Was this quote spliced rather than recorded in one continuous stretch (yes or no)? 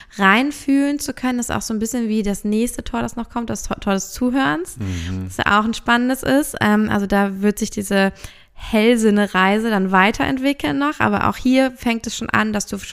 no